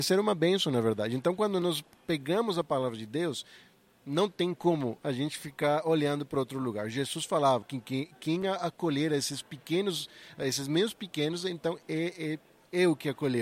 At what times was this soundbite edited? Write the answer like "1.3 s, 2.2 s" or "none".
7.6 s